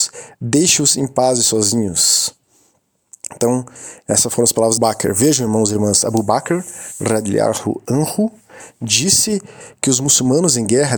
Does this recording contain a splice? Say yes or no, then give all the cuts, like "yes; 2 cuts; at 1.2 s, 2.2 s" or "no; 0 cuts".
yes; 1 cut; at 4.8 s